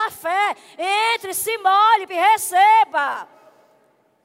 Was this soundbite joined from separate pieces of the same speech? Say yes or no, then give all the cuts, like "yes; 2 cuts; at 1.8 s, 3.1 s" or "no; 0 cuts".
yes; 1 cut; at 2.1 s